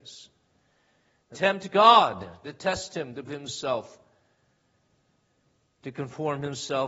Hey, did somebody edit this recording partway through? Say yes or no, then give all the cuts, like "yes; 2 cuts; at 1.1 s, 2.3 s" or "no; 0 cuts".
yes; 3 cuts; at 1.3 s, 2.4 s, 3.3 s